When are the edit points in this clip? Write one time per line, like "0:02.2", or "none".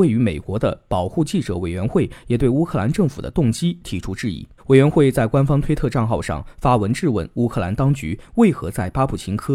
0:04.6

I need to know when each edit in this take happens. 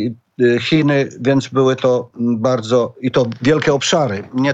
none

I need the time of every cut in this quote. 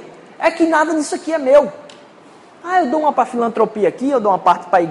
0:03.1

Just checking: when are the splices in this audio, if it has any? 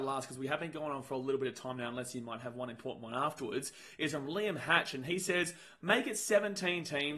none

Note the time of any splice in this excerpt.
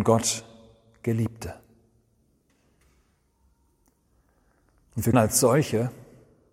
0:05.1

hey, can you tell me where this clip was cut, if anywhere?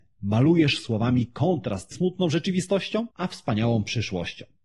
0:01.9
0:03.1

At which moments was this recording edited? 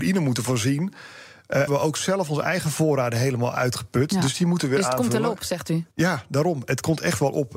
0:01.7
0:05.9

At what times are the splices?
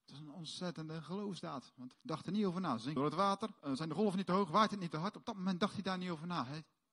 0:01.9
0:03.0
0:03.6

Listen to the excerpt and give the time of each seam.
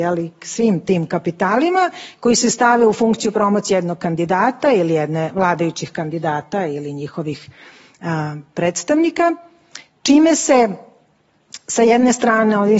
none

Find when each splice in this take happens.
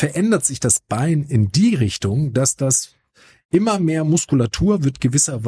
none

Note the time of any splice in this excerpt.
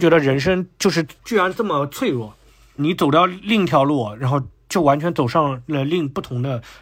0:01.2
0:02.8

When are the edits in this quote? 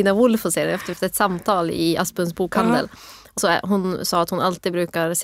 0:00.9
0:03.4

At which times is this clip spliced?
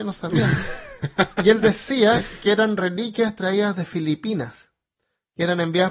none

